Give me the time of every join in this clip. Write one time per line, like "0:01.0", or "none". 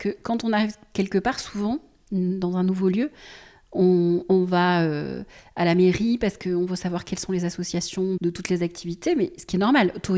0:08.2

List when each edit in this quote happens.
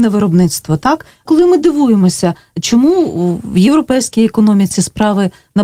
0:01.2

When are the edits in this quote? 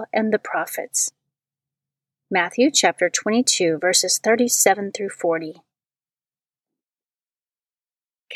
none

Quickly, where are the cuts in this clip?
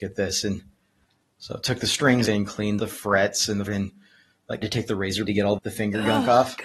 0:02.3
0:02.8
0:03.7
0:04.6
0:05.3
0:05.6

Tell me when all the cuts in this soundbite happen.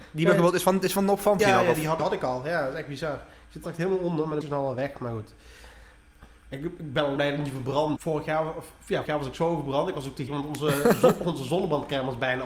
0:01.4
0:02.0
0:03.6
0:04.4
0:07.2
0:08.0
0:09.1
0:10.3

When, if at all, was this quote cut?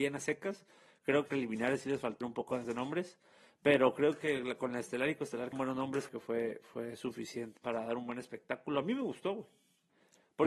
0:01.3
0:02.2
0:02.6
0:05.5
0:06.1
0:07.6

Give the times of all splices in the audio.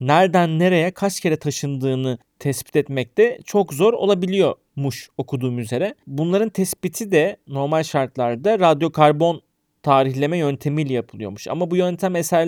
none

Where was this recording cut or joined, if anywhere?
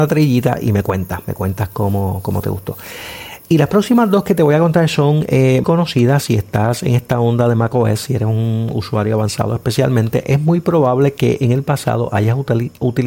0:05.6

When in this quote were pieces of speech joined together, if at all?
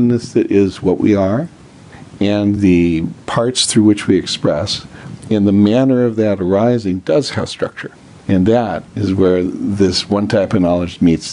none

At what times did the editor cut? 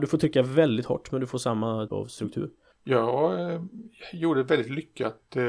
0:01.9
0:02.7

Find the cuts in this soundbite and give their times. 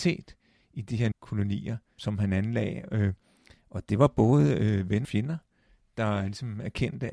0:01.1
0:02.0
0:05.0

